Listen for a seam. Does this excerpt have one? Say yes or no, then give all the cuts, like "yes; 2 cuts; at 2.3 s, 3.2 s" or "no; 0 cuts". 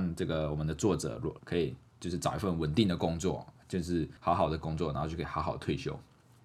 yes; 2 cuts; at 1.4 s, 4.2 s